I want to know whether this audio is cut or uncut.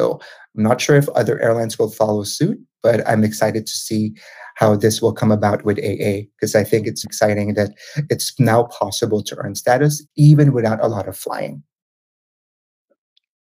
cut